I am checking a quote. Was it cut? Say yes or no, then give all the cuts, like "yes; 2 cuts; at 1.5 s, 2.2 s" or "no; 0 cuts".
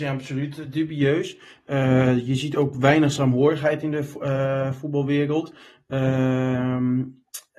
no; 0 cuts